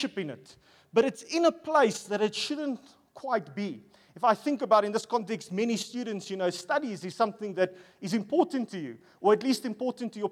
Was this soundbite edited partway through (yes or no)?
no